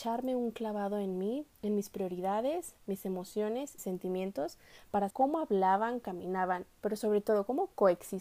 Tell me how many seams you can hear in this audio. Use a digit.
3